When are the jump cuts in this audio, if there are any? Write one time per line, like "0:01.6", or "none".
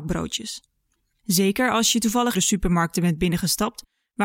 0:02.3